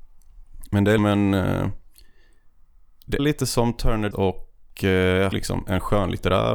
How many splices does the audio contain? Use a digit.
4